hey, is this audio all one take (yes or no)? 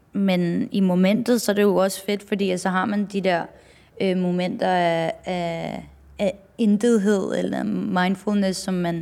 yes